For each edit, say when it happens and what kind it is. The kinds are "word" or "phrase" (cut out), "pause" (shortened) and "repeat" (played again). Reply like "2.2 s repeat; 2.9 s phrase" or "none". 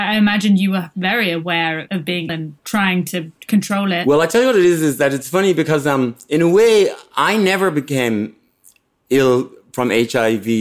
2.3 s word